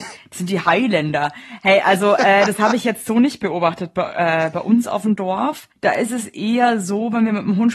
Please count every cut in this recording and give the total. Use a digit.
1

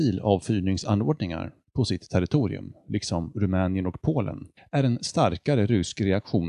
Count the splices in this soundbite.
1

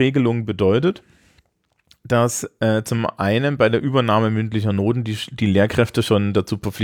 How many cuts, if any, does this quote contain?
0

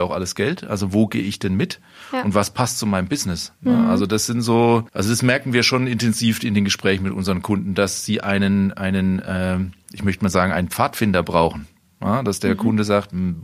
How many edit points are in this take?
2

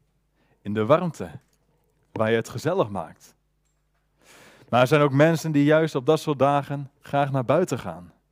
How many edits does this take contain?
1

